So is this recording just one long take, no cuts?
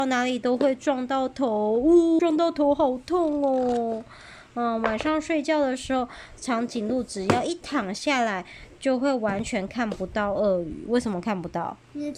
no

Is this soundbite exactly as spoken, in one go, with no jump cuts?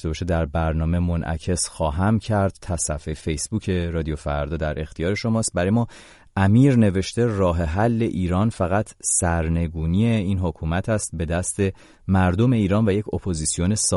yes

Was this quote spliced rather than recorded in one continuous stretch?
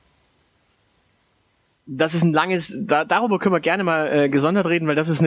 no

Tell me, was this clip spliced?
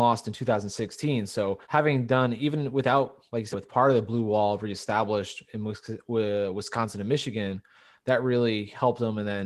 yes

